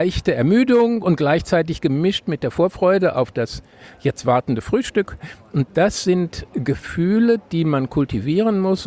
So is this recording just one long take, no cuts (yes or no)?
yes